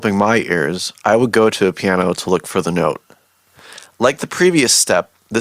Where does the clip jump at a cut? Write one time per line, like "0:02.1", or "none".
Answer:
none